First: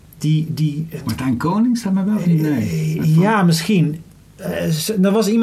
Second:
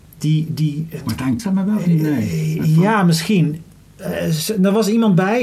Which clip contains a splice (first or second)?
second